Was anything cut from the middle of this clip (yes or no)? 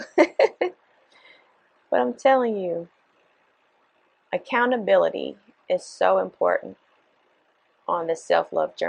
no